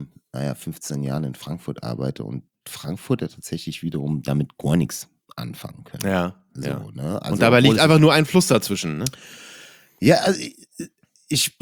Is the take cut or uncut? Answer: uncut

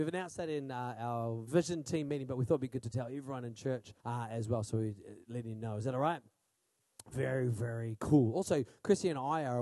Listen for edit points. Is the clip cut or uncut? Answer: cut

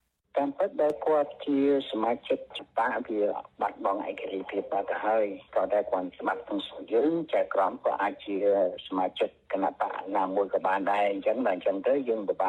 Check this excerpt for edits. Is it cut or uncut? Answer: cut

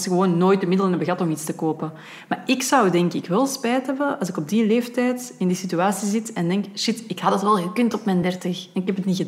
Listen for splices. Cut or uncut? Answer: uncut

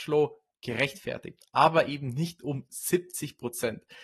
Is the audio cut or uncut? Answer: uncut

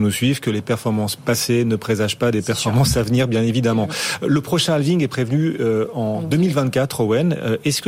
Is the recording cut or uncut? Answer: uncut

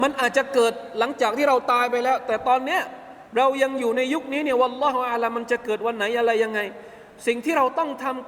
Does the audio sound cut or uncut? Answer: cut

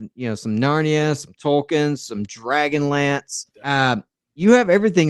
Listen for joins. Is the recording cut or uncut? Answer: cut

